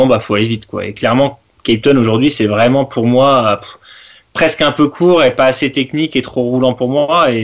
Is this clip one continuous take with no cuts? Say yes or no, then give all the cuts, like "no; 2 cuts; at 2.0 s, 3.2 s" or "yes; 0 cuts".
yes; 0 cuts